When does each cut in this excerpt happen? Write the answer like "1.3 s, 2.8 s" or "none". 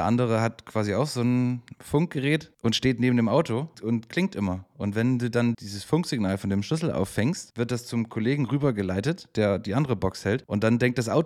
3.7 s, 5.5 s